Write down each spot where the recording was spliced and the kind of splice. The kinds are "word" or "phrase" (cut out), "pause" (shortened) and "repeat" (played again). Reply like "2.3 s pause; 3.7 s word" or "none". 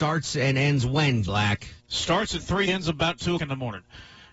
1.2 s word; 1.8 s pause; 2.7 s word; 3.4 s word